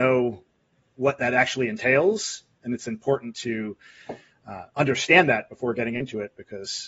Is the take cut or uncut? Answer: uncut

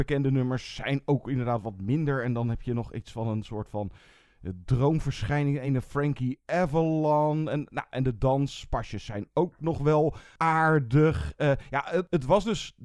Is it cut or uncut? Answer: uncut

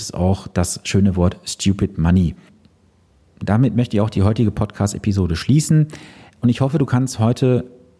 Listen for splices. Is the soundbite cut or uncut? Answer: uncut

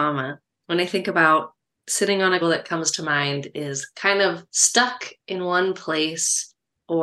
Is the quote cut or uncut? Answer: cut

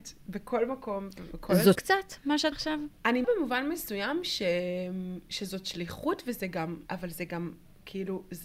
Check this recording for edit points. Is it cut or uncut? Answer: cut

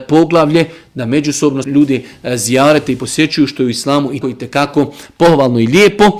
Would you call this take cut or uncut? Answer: cut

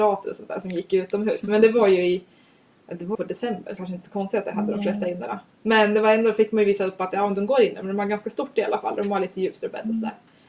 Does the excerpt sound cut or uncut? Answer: cut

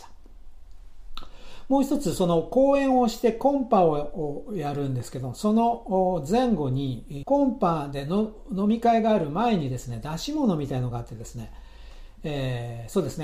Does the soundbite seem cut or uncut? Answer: cut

